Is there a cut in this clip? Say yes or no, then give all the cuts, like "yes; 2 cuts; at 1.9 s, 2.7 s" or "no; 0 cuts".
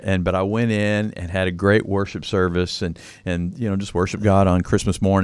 no; 0 cuts